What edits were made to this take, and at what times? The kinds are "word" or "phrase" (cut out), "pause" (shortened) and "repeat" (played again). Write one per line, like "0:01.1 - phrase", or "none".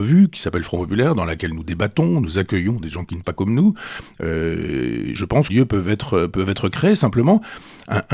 0:03.2 - word
0:05.2 - word
0:05.5 - phrase